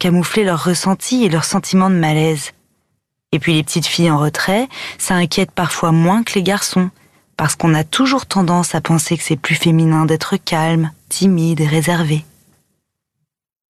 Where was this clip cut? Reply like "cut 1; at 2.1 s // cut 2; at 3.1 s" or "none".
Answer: none